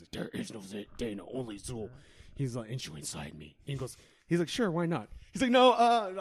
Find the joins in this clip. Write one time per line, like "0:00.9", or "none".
0:02.8